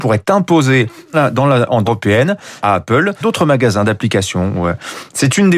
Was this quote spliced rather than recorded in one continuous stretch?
yes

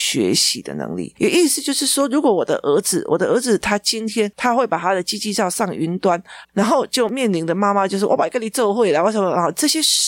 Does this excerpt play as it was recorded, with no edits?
no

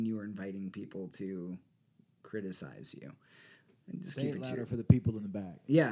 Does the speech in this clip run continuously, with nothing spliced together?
yes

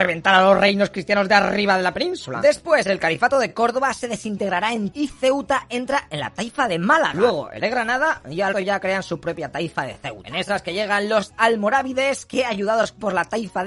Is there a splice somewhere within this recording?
yes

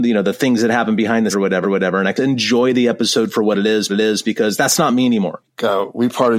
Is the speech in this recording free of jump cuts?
no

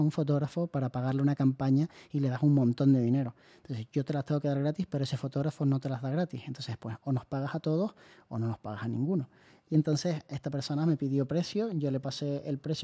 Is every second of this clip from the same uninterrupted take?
yes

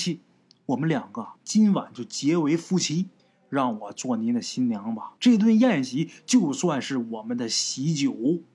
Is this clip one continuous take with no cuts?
no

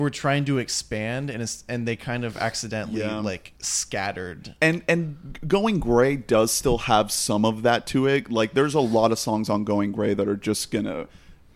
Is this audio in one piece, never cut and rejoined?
no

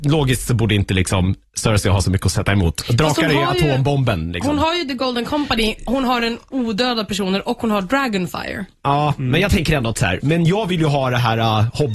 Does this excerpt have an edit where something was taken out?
no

